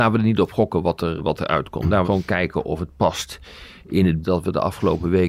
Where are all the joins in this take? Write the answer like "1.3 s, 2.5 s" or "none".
1.2 s, 2.0 s, 4.2 s

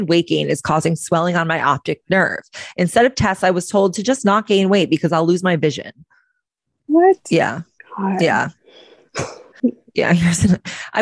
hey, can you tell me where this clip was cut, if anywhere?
7.8 s

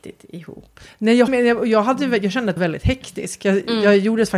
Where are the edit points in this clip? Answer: 1.3 s, 2.6 s

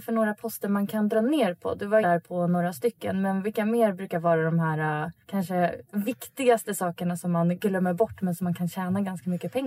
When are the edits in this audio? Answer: 2.0 s, 5.2 s

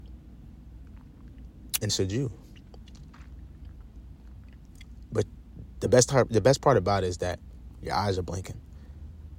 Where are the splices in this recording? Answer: 1.9 s

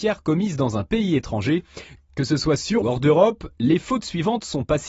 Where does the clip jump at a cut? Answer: 2.8 s

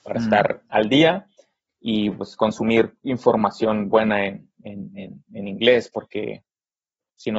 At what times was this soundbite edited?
none

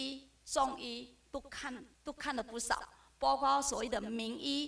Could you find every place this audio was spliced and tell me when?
1.9 s

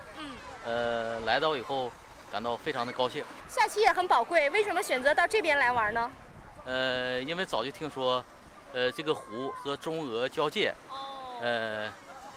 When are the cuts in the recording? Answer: none

